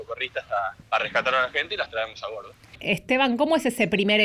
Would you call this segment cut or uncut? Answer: uncut